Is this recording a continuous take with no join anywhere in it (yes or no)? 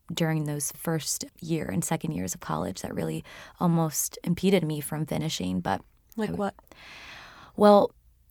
yes